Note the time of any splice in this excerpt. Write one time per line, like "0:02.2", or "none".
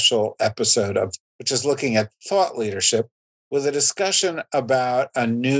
0:01.2